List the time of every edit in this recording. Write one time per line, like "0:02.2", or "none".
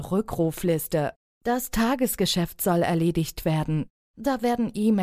none